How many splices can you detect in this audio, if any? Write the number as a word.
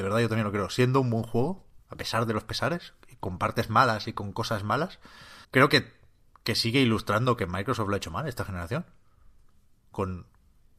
two